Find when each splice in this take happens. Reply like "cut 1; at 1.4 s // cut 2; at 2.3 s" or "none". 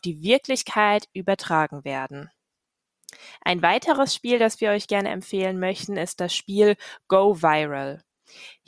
none